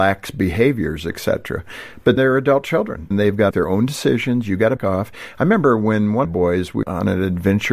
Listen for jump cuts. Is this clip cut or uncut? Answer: cut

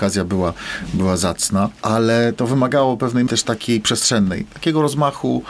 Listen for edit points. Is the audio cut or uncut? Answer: cut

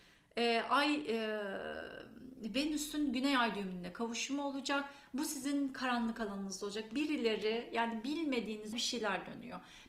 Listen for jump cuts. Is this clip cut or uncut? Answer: cut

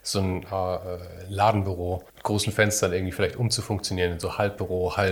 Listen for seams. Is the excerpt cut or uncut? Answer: cut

